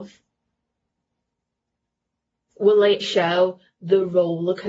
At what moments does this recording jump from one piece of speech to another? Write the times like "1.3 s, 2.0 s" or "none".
3.0 s